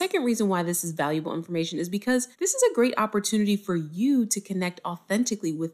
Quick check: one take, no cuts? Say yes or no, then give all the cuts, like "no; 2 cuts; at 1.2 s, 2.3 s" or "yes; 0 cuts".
no; 1 cut; at 2.3 s